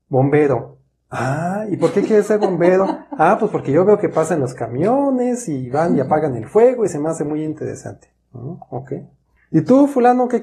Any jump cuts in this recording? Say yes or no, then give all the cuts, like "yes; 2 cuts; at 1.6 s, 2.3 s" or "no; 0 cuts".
no; 0 cuts